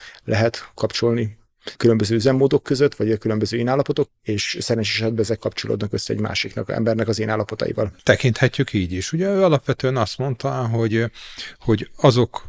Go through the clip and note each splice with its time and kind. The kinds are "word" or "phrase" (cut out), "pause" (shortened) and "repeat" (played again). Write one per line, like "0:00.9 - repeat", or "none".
0:04.1 - word
0:05.4 - word